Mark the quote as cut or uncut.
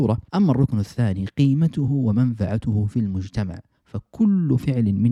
uncut